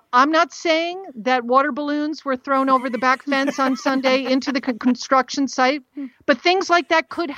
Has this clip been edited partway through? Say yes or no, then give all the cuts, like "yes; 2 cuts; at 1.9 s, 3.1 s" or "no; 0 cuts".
no; 0 cuts